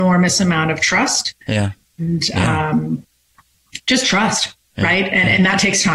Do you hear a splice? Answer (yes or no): yes